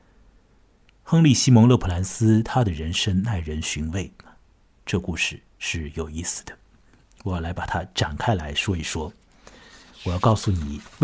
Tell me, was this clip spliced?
yes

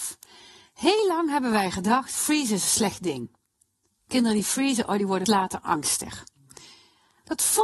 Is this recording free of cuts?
no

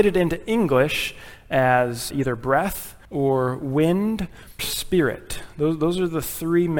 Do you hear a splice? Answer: yes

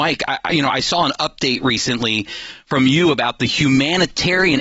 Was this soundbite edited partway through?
no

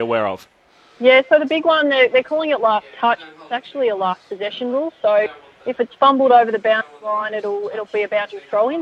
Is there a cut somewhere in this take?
no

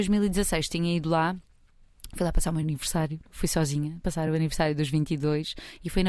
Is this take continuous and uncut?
yes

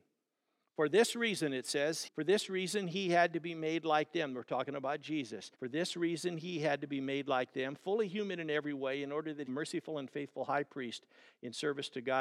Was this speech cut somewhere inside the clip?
yes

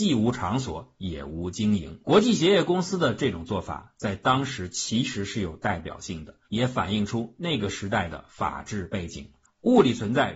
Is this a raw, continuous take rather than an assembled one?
no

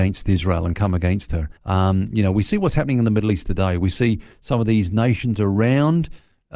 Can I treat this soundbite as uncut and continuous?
no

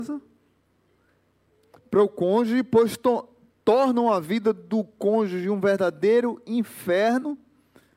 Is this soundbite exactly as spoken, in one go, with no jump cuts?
yes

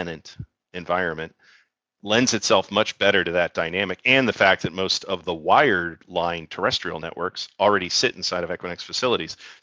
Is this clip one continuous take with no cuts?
yes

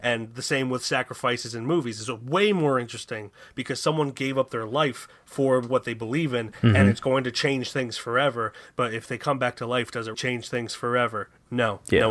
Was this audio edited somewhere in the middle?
yes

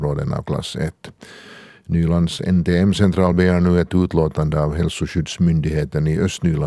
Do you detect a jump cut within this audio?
no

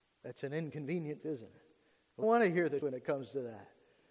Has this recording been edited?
yes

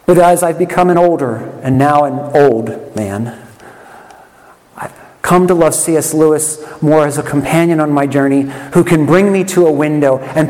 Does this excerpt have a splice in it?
no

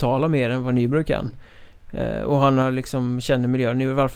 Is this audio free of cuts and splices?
yes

